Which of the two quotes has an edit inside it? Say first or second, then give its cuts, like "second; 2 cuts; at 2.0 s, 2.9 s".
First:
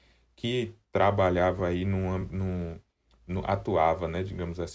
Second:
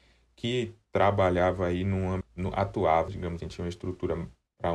second; 3 cuts; at 2.2 s, 3.1 s, 3.4 s